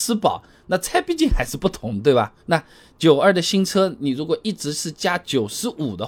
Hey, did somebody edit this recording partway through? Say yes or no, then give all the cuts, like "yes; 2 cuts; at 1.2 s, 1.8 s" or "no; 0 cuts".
yes; 1 cut; at 2.4 s